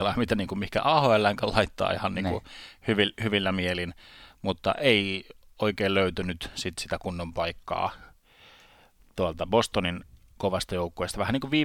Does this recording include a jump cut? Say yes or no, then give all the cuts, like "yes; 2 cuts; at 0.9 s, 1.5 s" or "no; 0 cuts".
no; 0 cuts